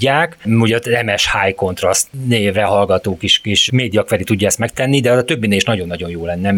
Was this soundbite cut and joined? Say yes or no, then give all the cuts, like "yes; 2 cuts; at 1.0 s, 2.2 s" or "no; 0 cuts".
yes; 1 cut; at 3.7 s